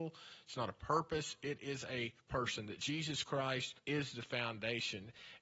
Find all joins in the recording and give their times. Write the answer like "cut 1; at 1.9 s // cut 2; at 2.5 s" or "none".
cut 1; at 2.2 s // cut 2; at 3.8 s

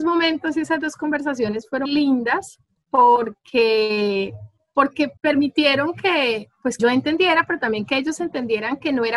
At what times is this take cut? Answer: cut 1; at 1.8 s // cut 2; at 5.2 s // cut 3; at 6.8 s

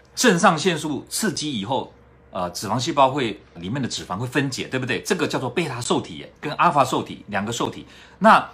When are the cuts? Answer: cut 1; at 3.6 s // cut 2; at 6.4 s

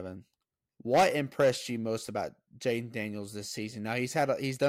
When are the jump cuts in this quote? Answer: none

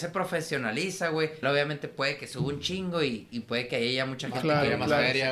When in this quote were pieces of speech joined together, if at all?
cut 1; at 1.4 s

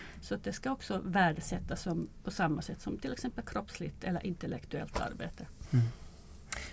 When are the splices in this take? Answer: none

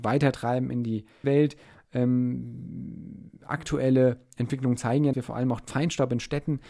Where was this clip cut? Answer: cut 1; at 1.2 s // cut 2; at 5.1 s

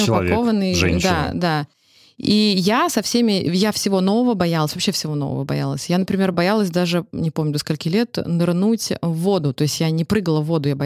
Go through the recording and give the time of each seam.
none

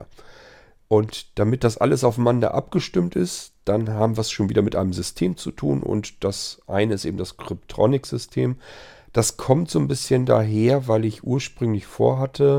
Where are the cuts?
none

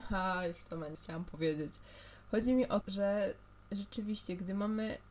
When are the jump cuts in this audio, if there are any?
cut 1; at 0.9 s // cut 2; at 2.8 s

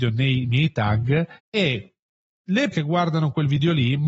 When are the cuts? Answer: cut 1; at 1.4 s // cut 2; at 2.7 s

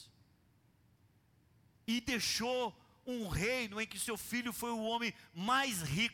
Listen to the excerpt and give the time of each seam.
none

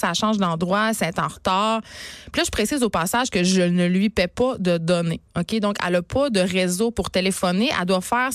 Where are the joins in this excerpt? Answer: none

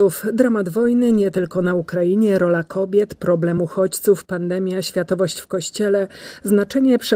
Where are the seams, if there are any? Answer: none

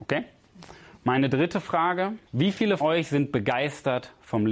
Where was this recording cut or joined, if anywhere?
cut 1; at 2.3 s // cut 2; at 2.8 s

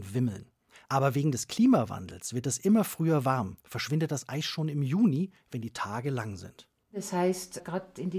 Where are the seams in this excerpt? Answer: none

